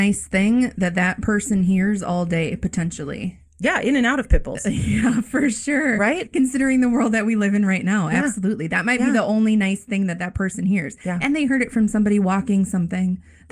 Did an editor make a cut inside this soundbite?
no; 0 cuts

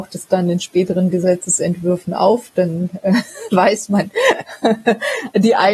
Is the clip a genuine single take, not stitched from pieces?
yes; 0 cuts

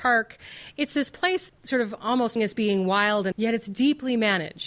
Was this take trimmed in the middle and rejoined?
yes; 3 cuts; at 1.5 s, 2.4 s, 3.3 s

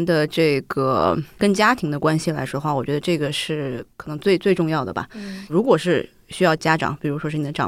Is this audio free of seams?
no; 1 cut; at 3.9 s

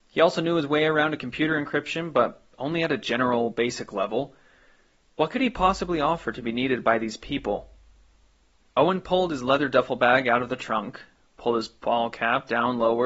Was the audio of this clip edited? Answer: no; 0 cuts

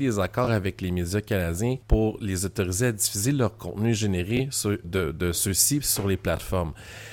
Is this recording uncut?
no; 2 cuts; at 1.8 s, 4.8 s

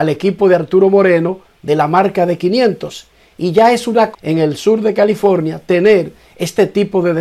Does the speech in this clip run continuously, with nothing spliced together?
no; 1 cut; at 4.1 s

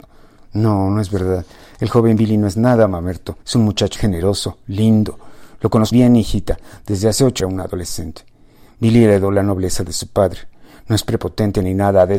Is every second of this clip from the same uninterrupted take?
no; 4 cuts; at 3.4 s, 4.0 s, 5.9 s, 7.4 s

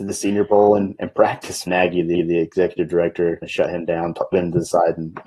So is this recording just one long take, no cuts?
no; 4 cuts; at 1.7 s, 2.1 s, 3.4 s, 4.3 s

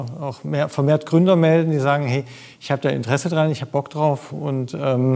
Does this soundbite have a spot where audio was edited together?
no; 0 cuts

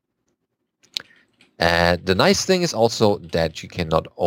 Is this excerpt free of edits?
yes; 0 cuts

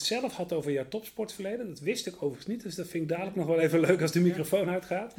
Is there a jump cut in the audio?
no; 0 cuts

